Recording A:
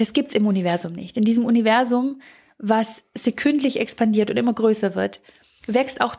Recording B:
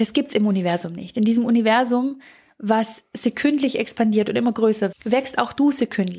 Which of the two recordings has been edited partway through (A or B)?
B